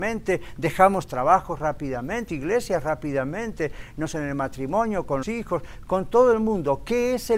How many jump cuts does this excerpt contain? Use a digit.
3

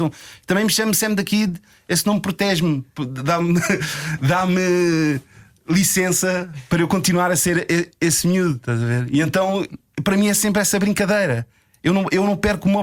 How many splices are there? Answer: 0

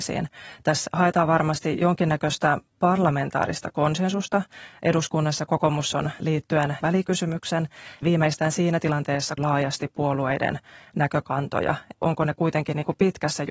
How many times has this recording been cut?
6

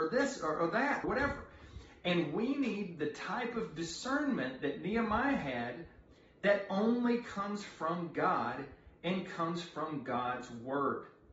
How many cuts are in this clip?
1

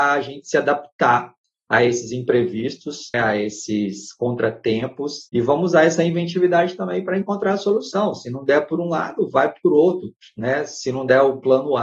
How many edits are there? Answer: 2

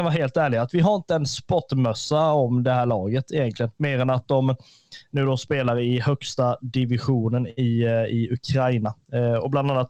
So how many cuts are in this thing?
0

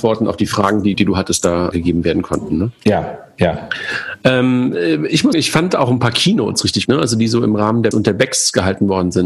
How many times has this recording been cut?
5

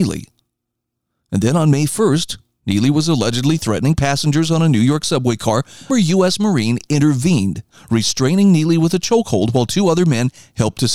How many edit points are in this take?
2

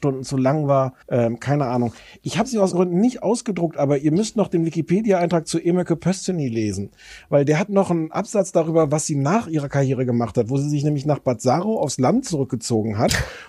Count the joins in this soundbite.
2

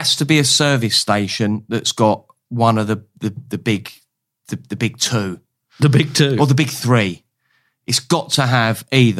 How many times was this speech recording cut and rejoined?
0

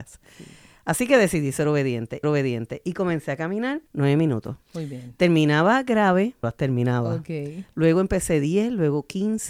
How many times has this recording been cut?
4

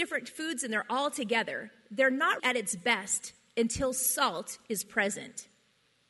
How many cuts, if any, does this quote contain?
1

